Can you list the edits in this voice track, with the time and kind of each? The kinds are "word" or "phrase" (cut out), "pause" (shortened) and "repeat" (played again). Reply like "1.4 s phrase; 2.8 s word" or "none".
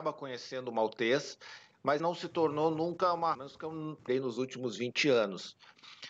2.0 s word; 3.3 s phrase; 4.1 s phrase